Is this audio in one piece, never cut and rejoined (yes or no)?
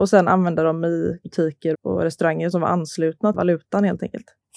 no